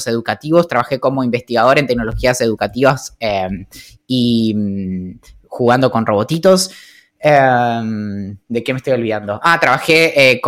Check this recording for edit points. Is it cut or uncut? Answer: uncut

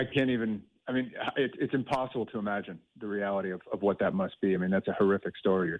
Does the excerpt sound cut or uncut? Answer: uncut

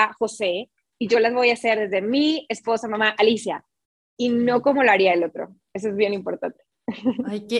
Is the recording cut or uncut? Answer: uncut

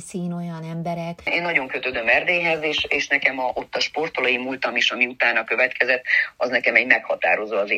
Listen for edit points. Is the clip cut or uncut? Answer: uncut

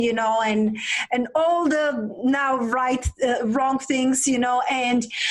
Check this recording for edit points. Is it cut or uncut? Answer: uncut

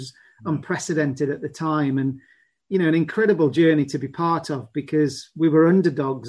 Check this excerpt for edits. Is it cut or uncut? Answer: uncut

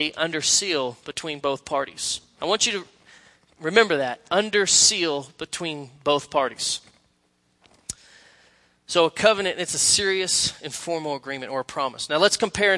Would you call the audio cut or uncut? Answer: uncut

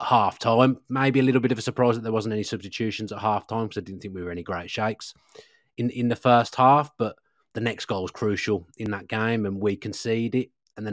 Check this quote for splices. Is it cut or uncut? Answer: uncut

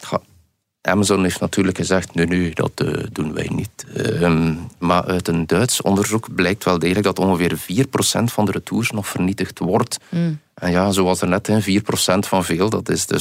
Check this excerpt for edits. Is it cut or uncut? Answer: uncut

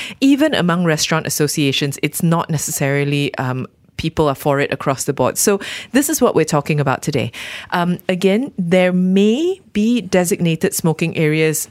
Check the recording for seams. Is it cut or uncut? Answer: uncut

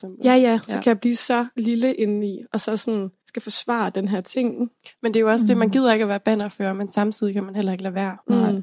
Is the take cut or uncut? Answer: uncut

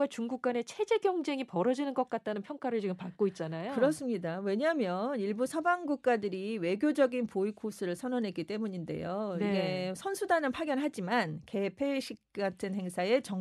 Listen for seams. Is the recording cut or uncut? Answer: uncut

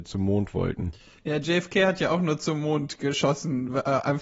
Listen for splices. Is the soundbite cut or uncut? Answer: uncut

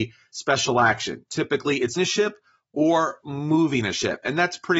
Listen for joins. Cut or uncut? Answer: cut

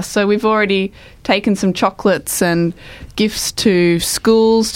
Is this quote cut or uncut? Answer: uncut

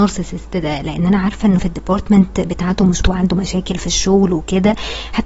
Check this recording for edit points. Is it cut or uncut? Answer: cut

